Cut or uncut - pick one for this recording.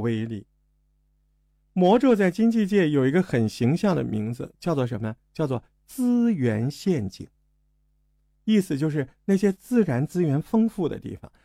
uncut